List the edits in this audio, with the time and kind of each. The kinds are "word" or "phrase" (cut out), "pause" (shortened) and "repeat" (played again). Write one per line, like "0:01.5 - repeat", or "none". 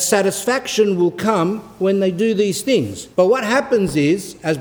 0:03.1 - pause